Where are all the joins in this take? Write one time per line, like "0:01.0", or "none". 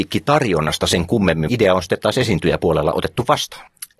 0:01.5